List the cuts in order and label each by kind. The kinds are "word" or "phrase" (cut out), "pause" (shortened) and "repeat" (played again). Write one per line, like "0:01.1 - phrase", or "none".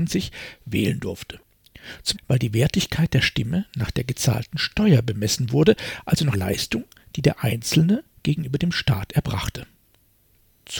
0:02.1 - word
0:06.3 - word